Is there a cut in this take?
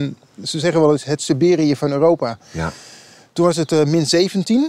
no; 0 cuts

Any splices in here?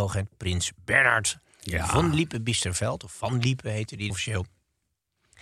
yes; 1 cut; at 4.1 s

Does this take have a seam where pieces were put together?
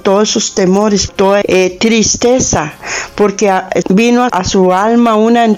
yes; 4 cuts; at 1.1 s, 1.4 s, 3.8 s, 4.3 s

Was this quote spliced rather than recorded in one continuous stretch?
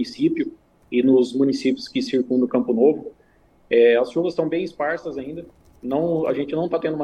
no; 0 cuts

